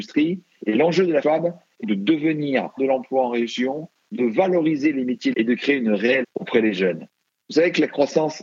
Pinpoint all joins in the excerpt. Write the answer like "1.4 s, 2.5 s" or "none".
1.2 s, 1.8 s, 2.8 s, 5.3 s, 6.2 s